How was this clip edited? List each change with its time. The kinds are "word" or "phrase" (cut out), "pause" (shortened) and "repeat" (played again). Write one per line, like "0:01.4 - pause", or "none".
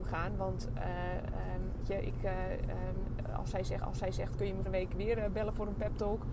0:01.8 - word
0:03.8 - repeat
0:04.7 - word